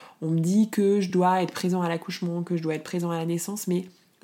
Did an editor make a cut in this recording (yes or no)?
no